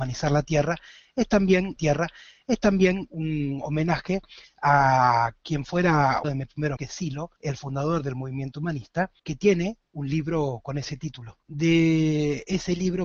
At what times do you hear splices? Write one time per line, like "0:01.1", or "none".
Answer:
0:01.8
0:06.2
0:06.8
0:07.4
0:09.2
0:11.4